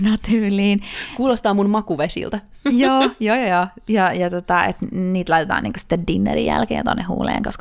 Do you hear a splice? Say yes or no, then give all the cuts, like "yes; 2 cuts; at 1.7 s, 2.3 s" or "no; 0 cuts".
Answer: no; 0 cuts